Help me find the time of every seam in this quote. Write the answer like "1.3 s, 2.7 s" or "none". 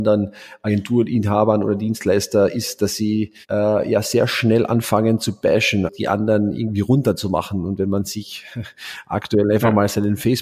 3.4 s, 5.9 s

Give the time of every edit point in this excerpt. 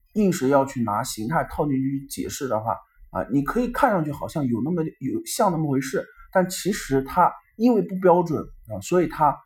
none

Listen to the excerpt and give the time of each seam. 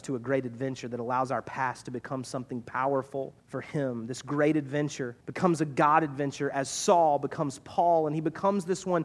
3.4 s, 5.2 s

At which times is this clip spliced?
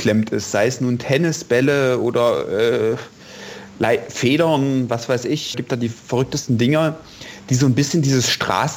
5.5 s

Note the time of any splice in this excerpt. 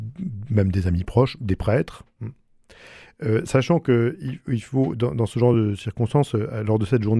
none

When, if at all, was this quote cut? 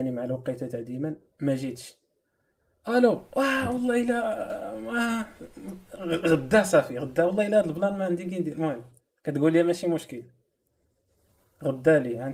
3.3 s

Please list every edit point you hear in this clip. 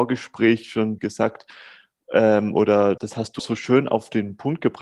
1.0 s, 3.0 s, 3.4 s

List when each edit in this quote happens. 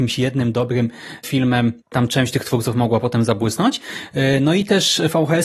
1.8 s

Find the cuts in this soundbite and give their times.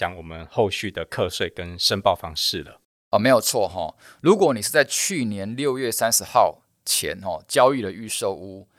none

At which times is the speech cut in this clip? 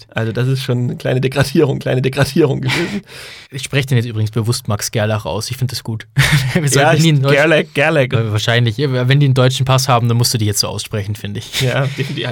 1.8 s, 3.4 s, 7.0 s, 8.1 s

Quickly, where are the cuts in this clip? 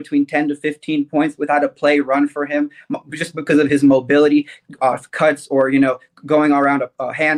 none

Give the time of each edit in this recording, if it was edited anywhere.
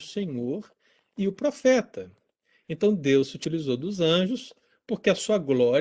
none

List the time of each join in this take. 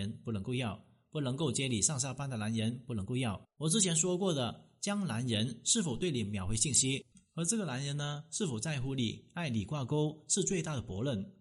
3.4 s, 7.1 s

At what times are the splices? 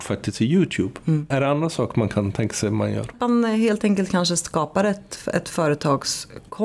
none

